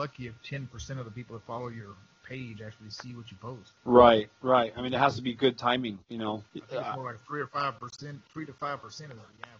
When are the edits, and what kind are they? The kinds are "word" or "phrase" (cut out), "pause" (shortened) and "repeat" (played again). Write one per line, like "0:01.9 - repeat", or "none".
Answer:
0:03.8 - pause
0:06.0 - pause
0:06.5 - pause
0:08.2 - pause